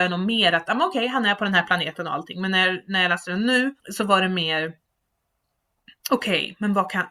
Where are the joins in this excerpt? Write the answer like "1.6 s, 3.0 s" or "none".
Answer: 3.8 s

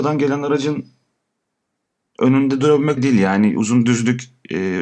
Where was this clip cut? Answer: 3.0 s

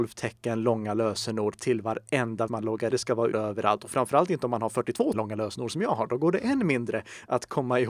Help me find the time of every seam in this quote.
2.5 s, 2.9 s, 3.3 s, 5.1 s

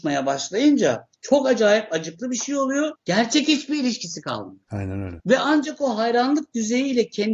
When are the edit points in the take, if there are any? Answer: 3.0 s, 4.6 s

